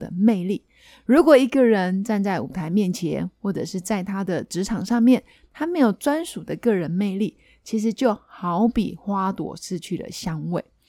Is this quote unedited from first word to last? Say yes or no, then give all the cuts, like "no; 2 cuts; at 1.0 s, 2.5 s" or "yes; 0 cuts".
yes; 0 cuts